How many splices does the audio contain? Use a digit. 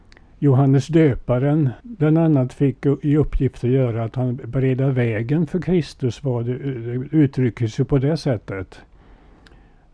1